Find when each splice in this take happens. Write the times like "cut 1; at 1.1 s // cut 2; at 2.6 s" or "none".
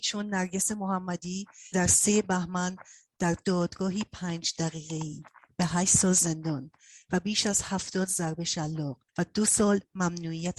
cut 1; at 1.7 s // cut 2; at 9.1 s